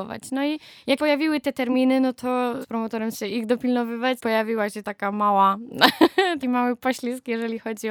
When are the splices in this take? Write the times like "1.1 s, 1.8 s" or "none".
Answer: 1.0 s, 2.6 s, 3.1 s, 4.2 s, 4.8 s, 6.4 s